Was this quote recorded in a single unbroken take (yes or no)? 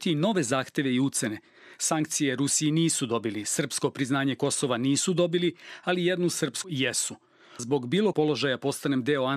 no